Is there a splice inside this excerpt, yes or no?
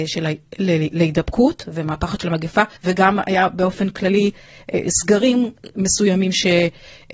yes